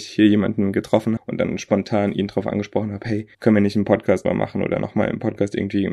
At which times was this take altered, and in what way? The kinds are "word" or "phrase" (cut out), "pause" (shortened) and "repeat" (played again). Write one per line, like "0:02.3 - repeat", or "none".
0:01.2 - word
0:03.3 - pause
0:04.2 - word